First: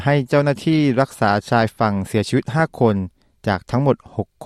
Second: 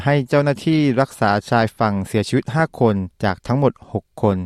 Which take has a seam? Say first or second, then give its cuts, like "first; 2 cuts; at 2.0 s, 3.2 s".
second; 1 cut; at 3.1 s